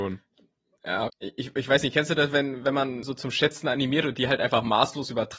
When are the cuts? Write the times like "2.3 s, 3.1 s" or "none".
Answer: 1.1 s, 3.0 s